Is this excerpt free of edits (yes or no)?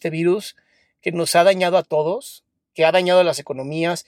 yes